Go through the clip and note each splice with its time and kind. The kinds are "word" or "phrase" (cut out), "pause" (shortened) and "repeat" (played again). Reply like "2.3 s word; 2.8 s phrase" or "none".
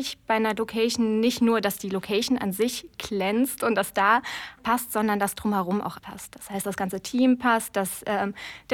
4.6 s word; 6.0 s word; 6.6 s word